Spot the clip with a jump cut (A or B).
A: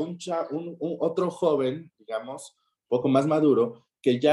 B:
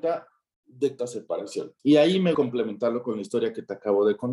B